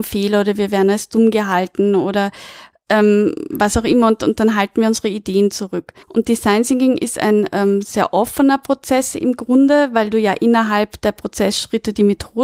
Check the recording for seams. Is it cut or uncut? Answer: cut